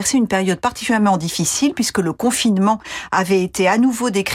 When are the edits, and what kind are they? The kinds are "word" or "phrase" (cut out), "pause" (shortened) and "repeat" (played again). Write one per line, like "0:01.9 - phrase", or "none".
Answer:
none